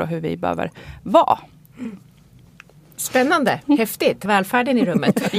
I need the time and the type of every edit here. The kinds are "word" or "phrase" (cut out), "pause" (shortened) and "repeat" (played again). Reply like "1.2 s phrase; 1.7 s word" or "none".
3.6 s pause; 4.3 s phrase